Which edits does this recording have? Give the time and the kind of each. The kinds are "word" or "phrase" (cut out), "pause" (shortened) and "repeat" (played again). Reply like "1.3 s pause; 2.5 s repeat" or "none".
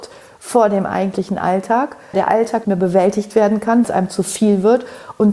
2.1 s word; 2.6 s word; 3.8 s word

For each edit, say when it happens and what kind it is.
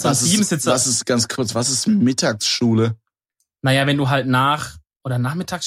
none

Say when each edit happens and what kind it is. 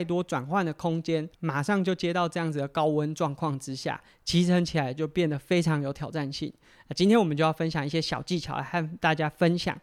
1.3 s pause

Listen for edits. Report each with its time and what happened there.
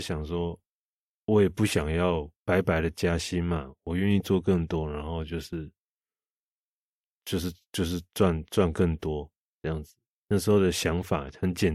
2.4 s pause

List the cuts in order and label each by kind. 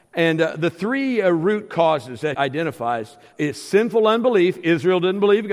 2.3 s word; 3.3 s word

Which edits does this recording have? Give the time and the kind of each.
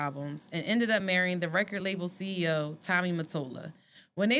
none

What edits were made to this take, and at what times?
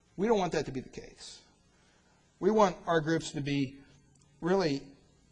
none

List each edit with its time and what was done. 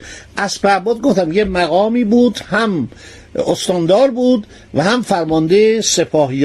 none

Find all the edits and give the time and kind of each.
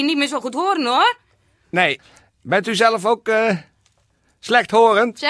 none

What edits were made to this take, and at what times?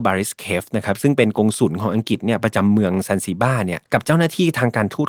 3.9 s pause

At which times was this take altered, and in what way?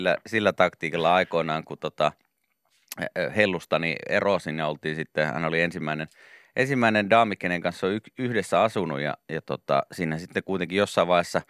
none

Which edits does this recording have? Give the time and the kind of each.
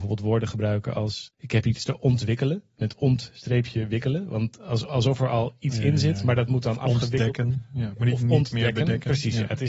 1.3 s pause

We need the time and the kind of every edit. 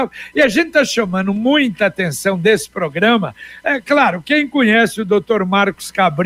none

